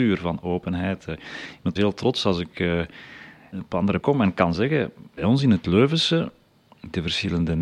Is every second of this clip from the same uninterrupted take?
no; 4 cuts; at 1.8 s, 3.5 s, 4.0 s, 5.2 s

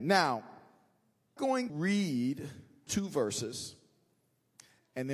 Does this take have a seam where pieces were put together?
yes; 3 cuts; at 1.4 s, 1.7 s, 2.9 s

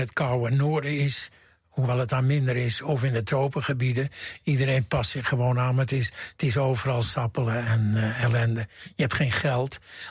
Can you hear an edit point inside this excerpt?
no; 0 cuts

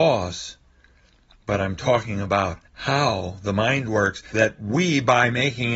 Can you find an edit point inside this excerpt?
yes; 2 cuts; at 2.7 s, 4.3 s

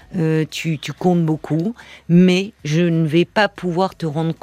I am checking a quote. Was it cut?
no; 0 cuts

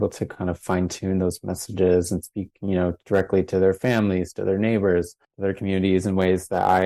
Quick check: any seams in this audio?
yes; 1 cut; at 5.2 s

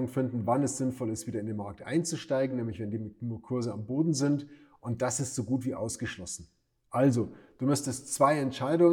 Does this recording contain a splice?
no; 0 cuts

